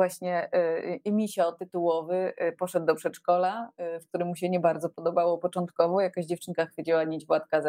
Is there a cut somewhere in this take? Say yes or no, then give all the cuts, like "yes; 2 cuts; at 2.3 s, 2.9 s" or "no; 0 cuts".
no; 0 cuts